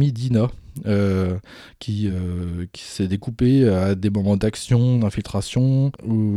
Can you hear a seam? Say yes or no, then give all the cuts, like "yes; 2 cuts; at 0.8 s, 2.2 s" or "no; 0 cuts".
no; 0 cuts